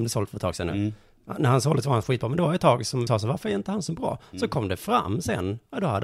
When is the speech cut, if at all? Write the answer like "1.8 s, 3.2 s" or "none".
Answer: 3.1 s